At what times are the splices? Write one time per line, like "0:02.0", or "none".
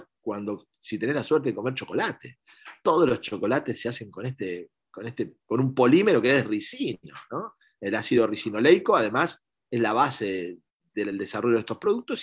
none